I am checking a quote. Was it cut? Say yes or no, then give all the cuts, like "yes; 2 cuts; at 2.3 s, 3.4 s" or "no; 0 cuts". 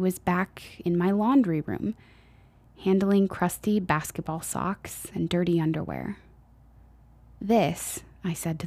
no; 0 cuts